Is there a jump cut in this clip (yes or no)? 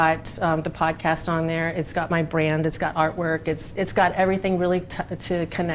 no